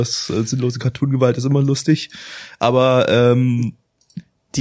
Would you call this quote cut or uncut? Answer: uncut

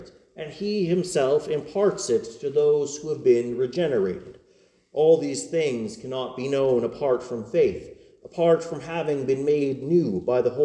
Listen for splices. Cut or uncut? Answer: uncut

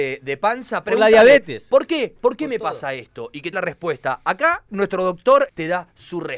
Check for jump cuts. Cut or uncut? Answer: cut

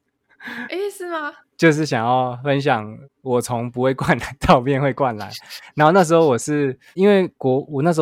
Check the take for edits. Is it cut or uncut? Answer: cut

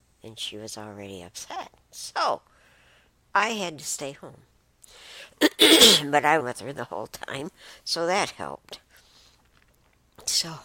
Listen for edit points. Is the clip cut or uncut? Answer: cut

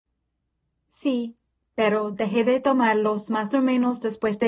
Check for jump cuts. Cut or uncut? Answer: uncut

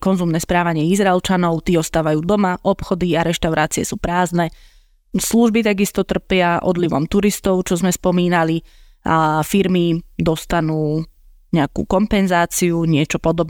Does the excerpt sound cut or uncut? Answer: uncut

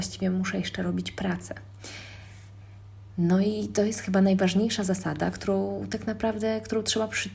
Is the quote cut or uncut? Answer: uncut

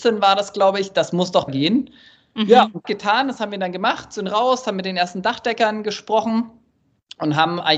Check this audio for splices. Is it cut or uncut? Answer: cut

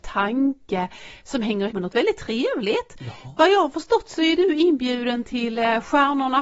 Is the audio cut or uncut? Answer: cut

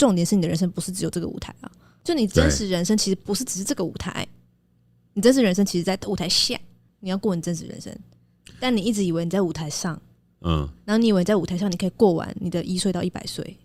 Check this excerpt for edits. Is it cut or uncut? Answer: uncut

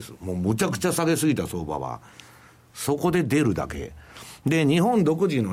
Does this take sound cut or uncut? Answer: uncut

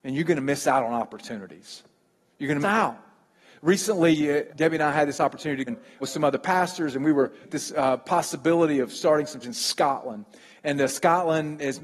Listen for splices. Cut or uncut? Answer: cut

